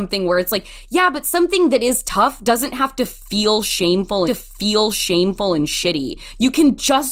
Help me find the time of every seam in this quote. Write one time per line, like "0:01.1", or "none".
0:04.3